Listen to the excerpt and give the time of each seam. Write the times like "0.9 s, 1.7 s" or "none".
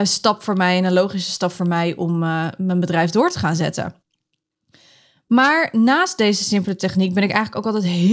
none